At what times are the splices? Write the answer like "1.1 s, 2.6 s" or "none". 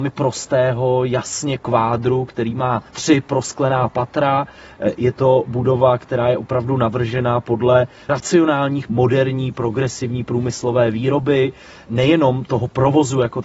1.6 s, 2.9 s, 8.1 s, 8.9 s